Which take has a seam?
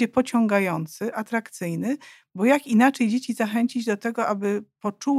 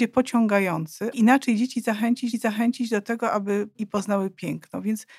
second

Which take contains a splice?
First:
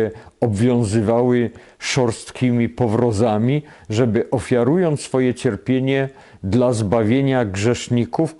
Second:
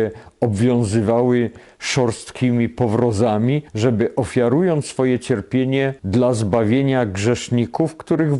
second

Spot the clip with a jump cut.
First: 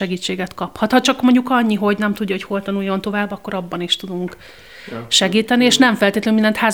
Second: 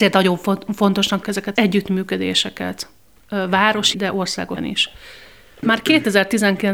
second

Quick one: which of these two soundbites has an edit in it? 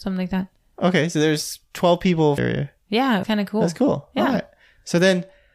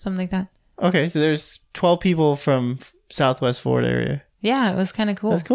first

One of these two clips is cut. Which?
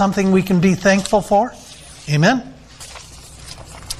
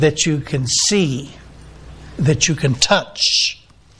second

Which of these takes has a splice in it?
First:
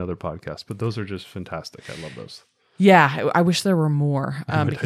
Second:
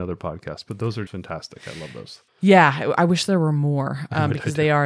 second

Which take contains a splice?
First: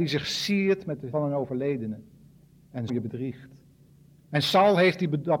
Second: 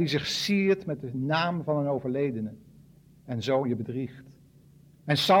first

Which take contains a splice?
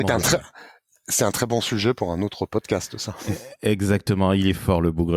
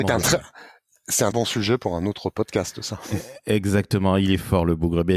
second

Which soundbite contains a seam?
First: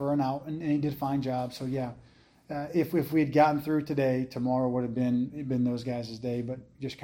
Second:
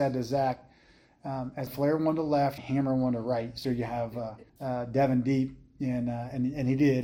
second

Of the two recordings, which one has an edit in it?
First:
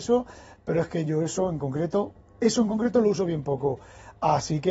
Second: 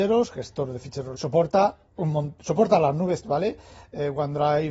second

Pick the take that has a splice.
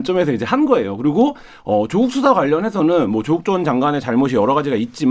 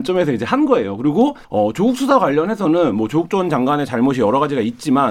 second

